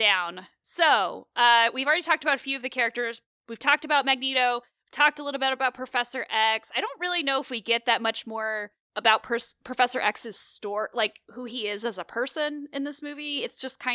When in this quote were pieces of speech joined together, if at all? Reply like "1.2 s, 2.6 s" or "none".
none

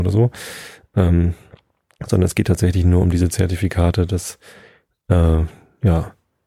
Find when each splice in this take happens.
none

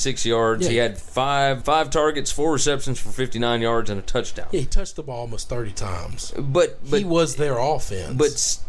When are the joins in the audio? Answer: 1.6 s

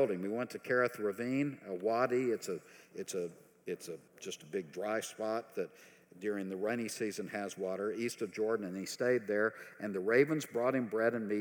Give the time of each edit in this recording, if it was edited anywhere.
4.1 s

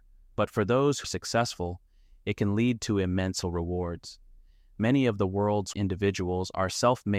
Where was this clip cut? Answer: 1.0 s, 3.4 s, 5.7 s

